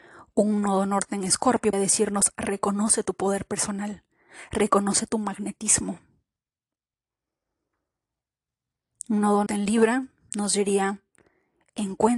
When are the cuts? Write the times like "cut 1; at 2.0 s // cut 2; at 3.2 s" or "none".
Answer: cut 1; at 1.7 s // cut 2; at 9.5 s